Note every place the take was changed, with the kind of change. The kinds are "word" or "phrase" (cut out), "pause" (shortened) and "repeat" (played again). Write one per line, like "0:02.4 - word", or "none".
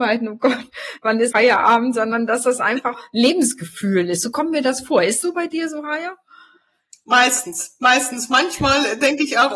0:01.3 - word
0:02.9 - word
0:05.2 - word